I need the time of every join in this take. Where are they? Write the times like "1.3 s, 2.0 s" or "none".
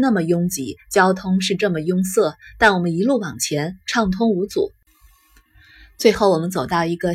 none